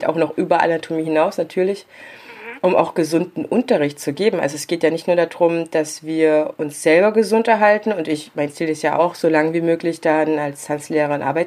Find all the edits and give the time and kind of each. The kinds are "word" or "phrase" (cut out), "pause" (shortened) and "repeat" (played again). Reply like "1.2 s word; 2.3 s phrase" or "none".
none